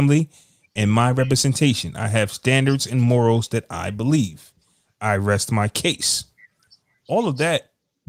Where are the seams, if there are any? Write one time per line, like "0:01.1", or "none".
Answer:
none

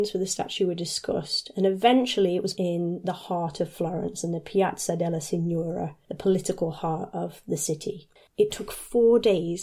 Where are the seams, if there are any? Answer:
0:02.5

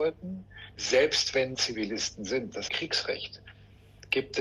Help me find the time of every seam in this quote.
0:01.5
0:02.7

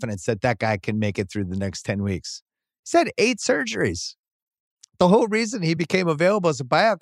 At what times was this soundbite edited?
none

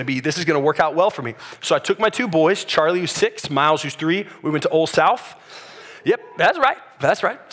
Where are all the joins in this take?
0:06.0

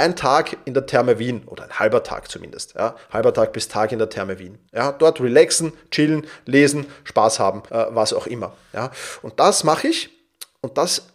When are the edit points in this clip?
0:04.7
0:07.7

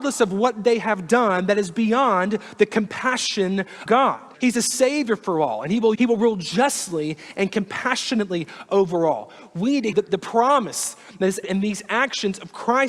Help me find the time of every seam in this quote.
0:03.9
0:04.3
0:05.9
0:09.9
0:11.4

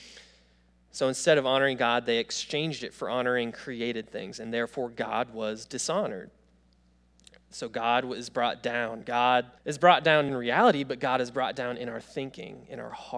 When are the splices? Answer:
0:09.6
0:10.3

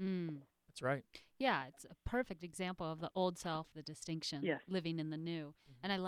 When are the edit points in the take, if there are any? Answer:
0:03.1
0:03.7

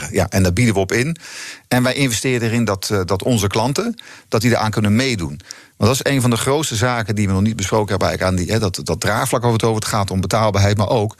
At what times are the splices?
none

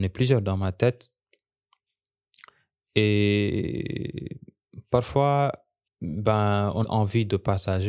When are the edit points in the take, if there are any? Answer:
0:05.9
0:06.8

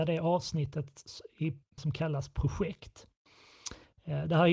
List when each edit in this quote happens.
0:01.8

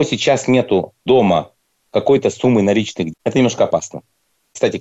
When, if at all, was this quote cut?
0:03.1

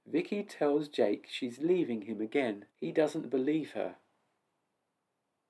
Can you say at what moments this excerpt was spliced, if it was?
0:02.7

